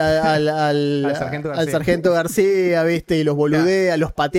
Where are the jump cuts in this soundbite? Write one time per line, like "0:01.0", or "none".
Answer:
none